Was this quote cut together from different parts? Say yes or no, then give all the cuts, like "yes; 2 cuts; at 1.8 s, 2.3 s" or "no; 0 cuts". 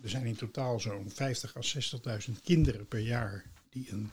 no; 0 cuts